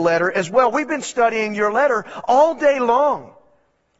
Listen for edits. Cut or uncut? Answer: uncut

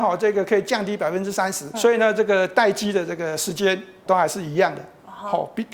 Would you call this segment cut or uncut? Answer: cut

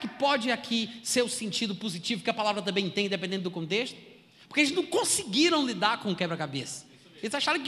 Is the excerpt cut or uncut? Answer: uncut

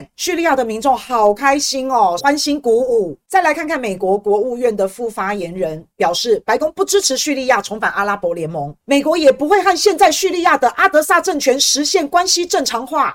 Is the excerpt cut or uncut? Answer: cut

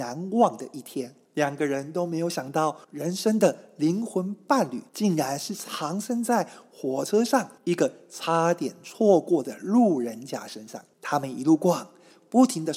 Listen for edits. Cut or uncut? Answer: cut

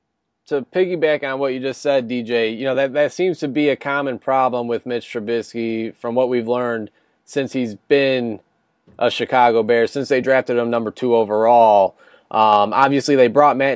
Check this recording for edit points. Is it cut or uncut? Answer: uncut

